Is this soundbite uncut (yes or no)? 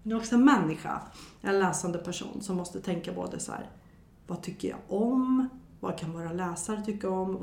yes